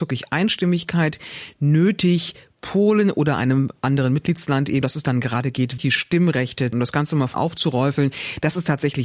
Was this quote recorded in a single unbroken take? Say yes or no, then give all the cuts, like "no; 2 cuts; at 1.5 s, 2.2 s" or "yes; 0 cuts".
no; 4 cuts; at 4.8 s, 5.8 s, 6.7 s, 7.3 s